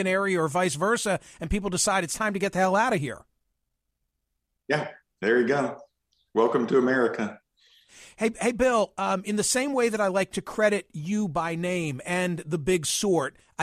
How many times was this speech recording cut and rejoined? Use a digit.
0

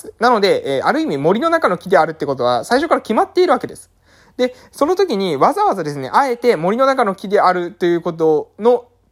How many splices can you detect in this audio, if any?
0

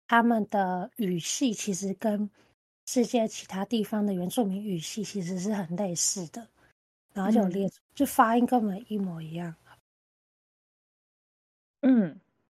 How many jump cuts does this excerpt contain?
1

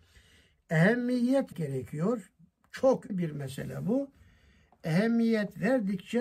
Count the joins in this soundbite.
2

